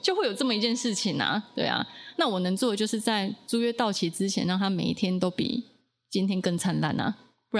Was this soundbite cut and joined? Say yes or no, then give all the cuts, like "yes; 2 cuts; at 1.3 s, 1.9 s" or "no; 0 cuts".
no; 0 cuts